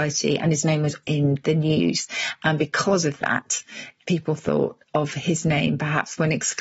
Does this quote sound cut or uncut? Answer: cut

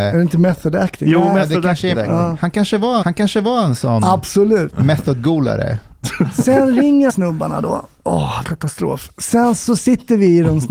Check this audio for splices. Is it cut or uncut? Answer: cut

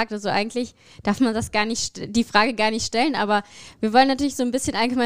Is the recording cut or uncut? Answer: uncut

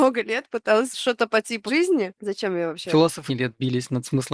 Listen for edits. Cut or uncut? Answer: cut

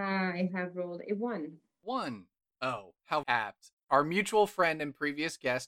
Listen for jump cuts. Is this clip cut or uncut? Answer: cut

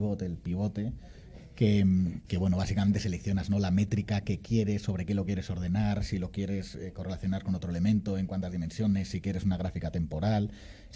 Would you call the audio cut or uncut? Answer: uncut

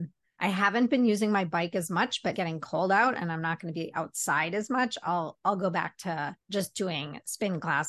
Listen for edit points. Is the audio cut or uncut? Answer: cut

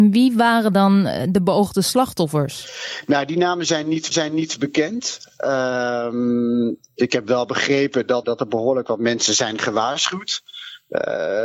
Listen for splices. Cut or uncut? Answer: cut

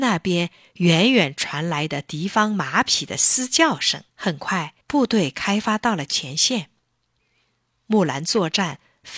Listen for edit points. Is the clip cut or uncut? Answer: cut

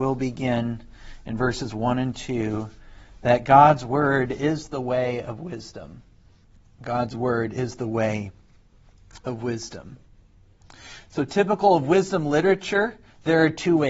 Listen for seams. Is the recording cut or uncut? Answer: uncut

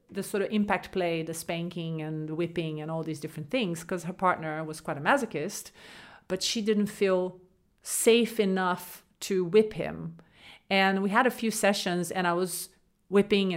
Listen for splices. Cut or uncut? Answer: uncut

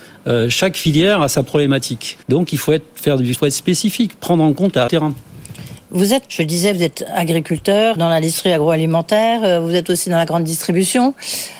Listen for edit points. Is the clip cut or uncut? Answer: cut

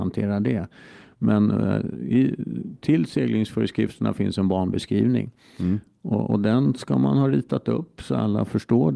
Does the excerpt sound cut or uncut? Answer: uncut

